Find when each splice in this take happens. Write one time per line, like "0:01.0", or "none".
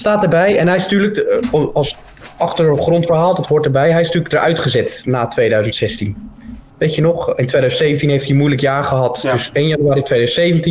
0:06.7